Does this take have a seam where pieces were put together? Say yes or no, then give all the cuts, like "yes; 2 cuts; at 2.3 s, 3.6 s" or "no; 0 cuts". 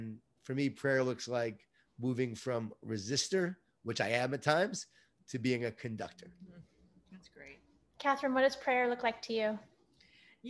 no; 0 cuts